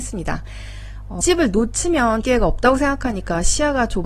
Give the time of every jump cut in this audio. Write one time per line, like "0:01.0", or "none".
0:01.2
0:02.2